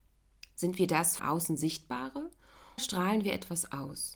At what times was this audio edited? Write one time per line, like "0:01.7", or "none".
0:01.2
0:02.8